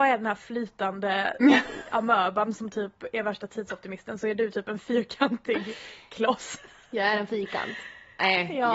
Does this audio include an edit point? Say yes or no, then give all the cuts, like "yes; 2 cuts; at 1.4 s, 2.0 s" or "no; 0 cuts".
no; 0 cuts